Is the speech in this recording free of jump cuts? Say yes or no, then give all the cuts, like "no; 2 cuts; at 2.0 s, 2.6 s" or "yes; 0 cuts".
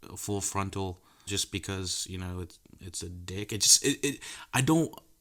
no; 1 cut; at 1.3 s